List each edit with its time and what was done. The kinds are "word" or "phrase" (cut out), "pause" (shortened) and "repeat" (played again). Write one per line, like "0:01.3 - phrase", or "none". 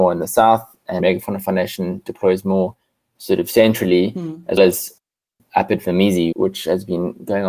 0:01.0 - word
0:04.6 - word
0:06.3 - word

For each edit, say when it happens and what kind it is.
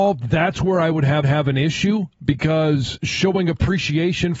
0:01.2 - repeat

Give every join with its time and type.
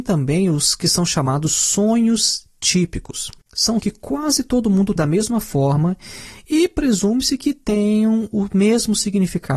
0:03.8 - word
0:05.0 - word

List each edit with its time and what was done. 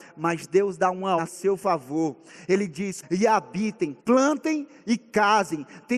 0:01.2 - word
0:03.0 - word
0:04.0 - pause

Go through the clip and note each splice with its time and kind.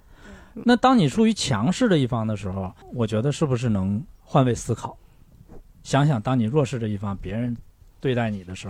0:02.8 - pause
0:04.2 - pause

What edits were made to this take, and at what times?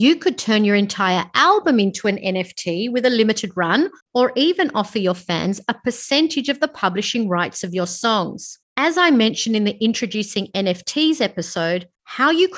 0:08.7 - pause

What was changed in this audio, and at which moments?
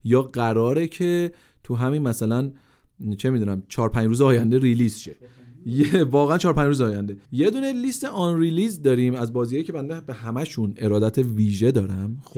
0:07.2 - pause

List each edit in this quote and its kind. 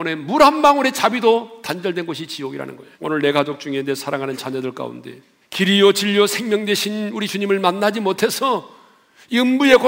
0:02.9 - pause
0:05.4 - pause

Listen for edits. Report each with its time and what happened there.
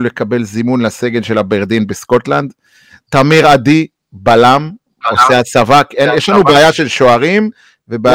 none

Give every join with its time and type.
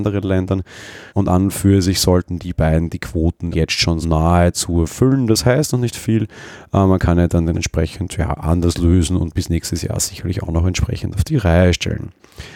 0:01.1 - pause
0:03.5 - word
0:04.0 - word
0:07.5 - word

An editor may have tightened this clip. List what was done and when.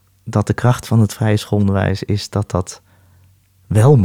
none

